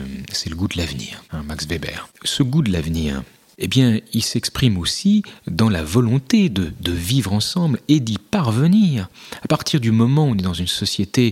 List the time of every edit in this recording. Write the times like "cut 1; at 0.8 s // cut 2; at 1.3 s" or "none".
none